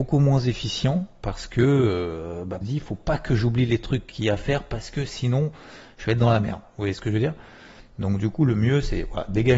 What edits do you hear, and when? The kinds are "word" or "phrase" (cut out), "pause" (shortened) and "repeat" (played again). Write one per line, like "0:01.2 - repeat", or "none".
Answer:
0:02.6 - phrase